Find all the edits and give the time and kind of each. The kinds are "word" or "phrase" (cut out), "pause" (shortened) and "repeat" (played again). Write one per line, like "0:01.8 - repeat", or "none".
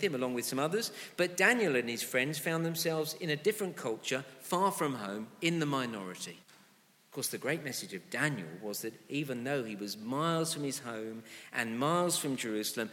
0:06.4 - pause